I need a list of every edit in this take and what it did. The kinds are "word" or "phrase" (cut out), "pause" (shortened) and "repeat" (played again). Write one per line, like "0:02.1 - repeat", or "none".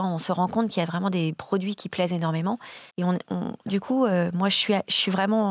0:02.9 - pause